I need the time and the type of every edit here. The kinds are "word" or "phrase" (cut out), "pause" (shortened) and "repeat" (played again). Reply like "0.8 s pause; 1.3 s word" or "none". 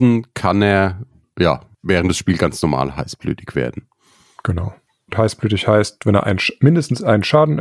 none